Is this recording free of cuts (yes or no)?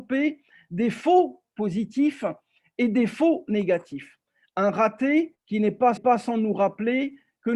no